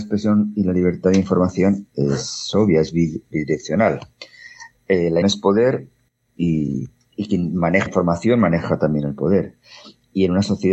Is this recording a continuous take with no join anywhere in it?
no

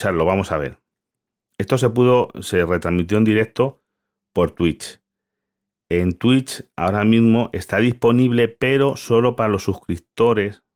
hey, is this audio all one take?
yes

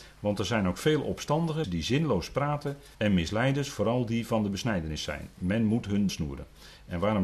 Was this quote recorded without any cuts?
no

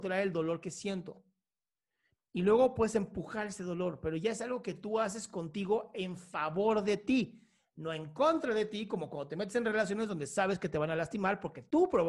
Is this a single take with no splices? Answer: yes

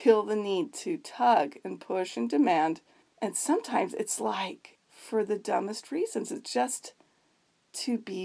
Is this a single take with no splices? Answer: yes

